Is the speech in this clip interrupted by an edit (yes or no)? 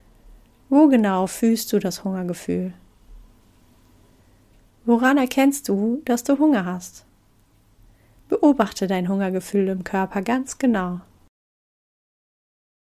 no